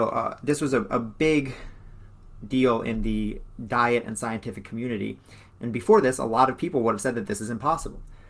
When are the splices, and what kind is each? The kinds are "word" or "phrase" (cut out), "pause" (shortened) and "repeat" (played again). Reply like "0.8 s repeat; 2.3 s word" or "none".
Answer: none